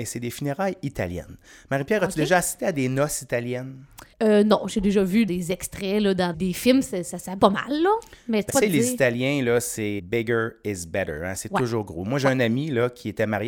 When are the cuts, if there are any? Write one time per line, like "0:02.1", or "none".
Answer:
0:04.1
0:05.3
0:06.3
0:07.4
0:08.5
0:10.0